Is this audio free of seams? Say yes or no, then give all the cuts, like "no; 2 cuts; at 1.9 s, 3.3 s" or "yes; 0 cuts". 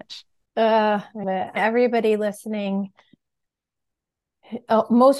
no; 2 cuts; at 1.2 s, 1.6 s